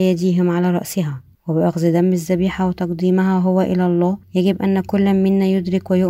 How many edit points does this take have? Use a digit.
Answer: 2